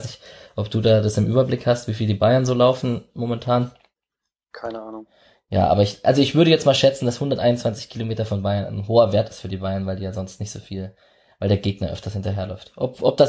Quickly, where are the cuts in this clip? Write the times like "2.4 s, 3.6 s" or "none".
none